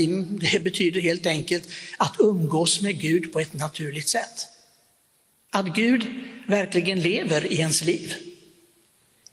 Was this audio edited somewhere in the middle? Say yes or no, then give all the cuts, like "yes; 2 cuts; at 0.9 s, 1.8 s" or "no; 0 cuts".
no; 0 cuts